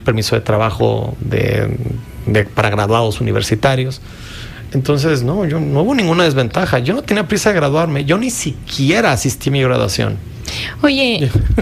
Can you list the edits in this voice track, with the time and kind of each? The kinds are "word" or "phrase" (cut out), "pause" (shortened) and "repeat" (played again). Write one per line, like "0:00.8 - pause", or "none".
none